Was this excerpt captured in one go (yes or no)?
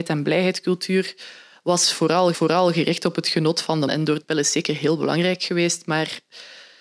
no